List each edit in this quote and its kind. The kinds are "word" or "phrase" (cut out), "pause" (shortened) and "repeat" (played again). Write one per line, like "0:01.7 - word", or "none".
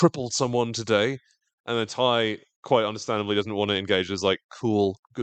none